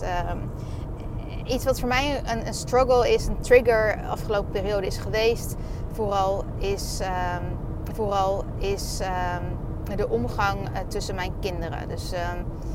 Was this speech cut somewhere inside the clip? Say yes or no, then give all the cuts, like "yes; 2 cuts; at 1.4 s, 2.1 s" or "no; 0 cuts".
yes; 1 cut; at 7.9 s